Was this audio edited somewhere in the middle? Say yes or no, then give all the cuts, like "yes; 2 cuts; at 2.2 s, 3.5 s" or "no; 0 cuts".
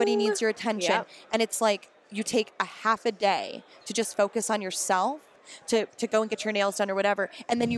no; 0 cuts